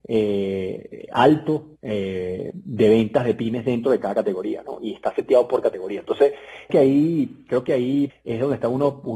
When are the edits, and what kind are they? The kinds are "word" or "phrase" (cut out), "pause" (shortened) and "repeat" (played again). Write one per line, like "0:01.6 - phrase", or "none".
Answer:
0:01.8 - pause
0:06.7 - word
0:08.1 - word